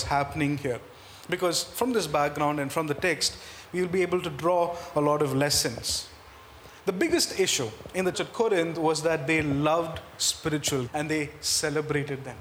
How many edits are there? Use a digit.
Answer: 2